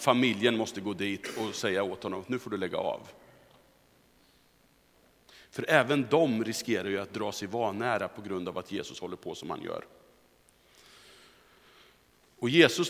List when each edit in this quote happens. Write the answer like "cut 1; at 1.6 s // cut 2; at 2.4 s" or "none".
none